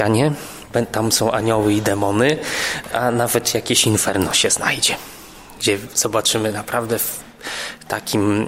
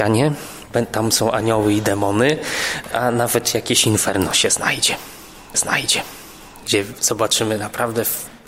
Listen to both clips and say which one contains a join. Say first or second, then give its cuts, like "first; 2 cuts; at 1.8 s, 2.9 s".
second; 1 cut; at 5.5 s